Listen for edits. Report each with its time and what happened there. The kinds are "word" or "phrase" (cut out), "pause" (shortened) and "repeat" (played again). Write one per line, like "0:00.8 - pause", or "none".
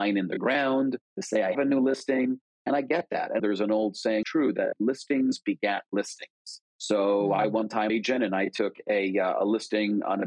0:01.5 - word
0:03.4 - word
0:04.2 - phrase
0:07.9 - phrase